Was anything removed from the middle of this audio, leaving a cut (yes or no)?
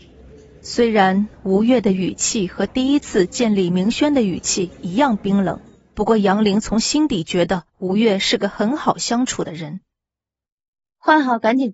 yes